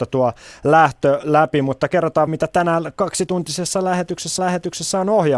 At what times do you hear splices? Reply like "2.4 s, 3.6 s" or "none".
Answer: 2.3 s, 4.4 s